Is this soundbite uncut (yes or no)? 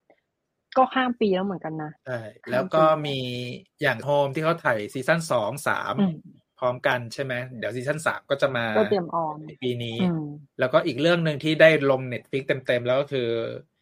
no